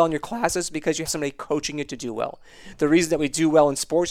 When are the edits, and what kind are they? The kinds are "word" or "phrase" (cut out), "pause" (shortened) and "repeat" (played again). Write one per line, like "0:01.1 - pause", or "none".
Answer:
0:01.1 - word